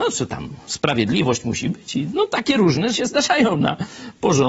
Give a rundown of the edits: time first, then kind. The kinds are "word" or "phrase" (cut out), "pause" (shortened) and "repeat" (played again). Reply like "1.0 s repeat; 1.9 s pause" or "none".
2.9 s word